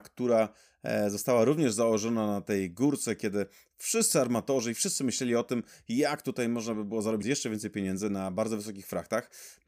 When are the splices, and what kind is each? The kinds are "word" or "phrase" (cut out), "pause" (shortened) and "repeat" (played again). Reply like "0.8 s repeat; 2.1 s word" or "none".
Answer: none